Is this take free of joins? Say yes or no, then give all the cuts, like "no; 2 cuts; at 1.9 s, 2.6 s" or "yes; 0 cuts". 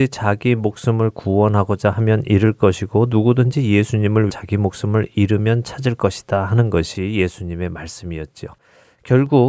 no; 1 cut; at 4.3 s